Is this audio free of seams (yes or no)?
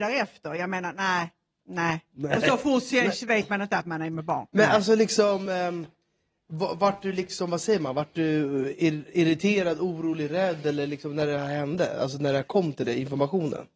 yes